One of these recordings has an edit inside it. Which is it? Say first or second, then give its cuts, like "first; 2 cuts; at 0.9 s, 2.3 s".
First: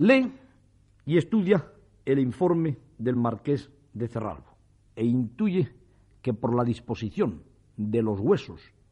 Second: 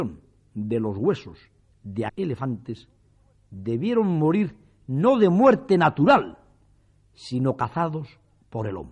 second; 1 cut; at 2.1 s